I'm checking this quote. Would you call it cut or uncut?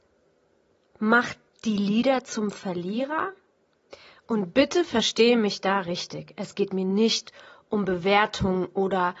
uncut